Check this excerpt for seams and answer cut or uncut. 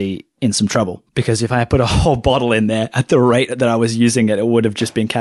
cut